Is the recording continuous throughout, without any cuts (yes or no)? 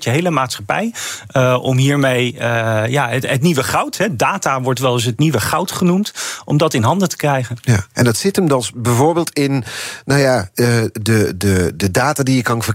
yes